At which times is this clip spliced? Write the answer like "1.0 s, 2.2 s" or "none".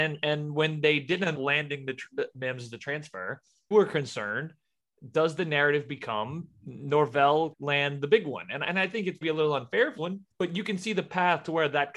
1.3 s, 3.7 s, 7.5 s, 9.2 s, 10.0 s, 10.3 s